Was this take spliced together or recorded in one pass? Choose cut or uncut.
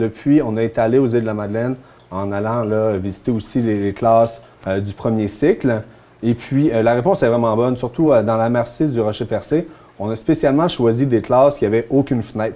uncut